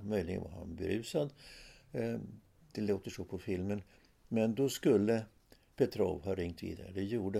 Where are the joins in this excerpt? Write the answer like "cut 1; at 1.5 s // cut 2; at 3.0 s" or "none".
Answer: none